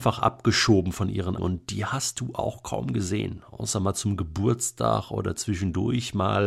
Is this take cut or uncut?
cut